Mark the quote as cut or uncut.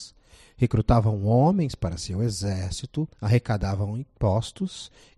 cut